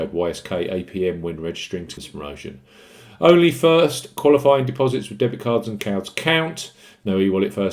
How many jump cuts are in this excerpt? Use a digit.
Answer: 2